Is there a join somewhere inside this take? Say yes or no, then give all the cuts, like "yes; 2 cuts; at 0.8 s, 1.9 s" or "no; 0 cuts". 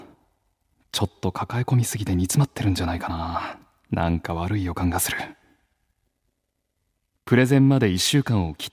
no; 0 cuts